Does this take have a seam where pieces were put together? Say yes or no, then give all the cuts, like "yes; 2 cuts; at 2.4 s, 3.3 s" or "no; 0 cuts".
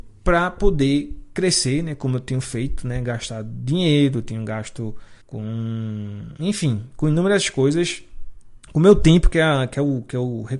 yes; 2 cuts; at 5.2 s, 8.6 s